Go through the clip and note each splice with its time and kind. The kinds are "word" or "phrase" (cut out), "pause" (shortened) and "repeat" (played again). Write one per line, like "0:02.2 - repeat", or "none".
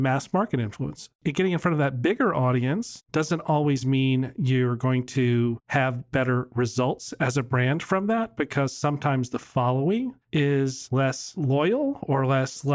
0:10.2 - pause